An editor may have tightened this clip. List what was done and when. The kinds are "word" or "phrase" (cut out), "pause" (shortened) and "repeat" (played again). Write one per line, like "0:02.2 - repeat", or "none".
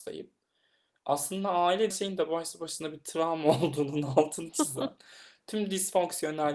0:01.9 - word